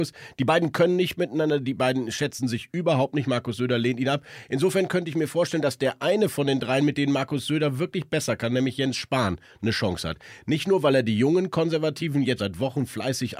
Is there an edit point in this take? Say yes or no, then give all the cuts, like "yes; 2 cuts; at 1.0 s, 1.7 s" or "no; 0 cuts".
yes; 1 cut; at 12.4 s